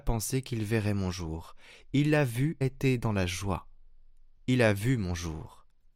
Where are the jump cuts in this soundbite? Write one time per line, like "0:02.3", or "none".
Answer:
0:02.6